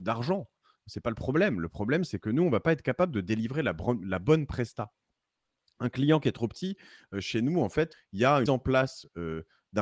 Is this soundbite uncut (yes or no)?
no